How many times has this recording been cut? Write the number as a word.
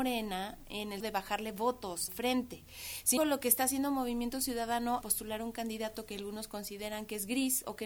four